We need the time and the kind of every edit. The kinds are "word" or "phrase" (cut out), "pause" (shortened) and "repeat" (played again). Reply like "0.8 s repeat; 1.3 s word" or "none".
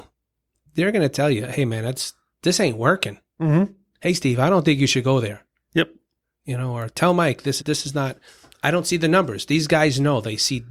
7.6 s word